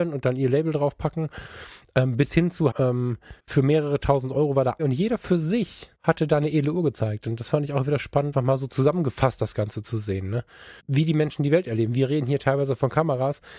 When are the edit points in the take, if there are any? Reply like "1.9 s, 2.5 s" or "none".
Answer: 2.7 s, 3.4 s, 4.8 s, 5.9 s, 8.3 s, 10.8 s

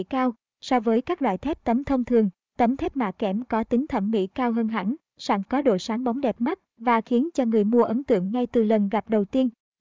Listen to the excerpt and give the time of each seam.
5.4 s

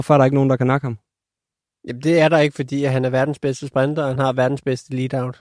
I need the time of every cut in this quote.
none

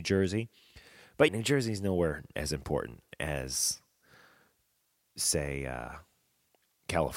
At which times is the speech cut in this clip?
1.3 s, 2.3 s

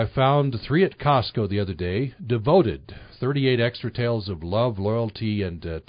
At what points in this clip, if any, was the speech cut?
none

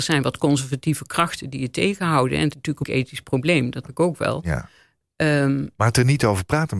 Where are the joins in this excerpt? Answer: 2.5 s, 2.8 s, 3.8 s

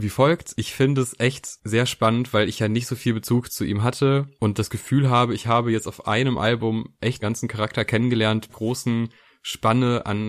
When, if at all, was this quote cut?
7.2 s, 8.5 s

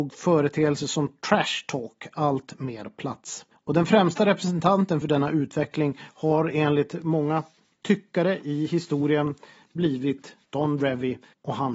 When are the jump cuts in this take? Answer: none

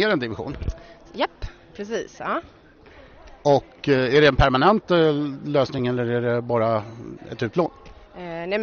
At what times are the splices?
none

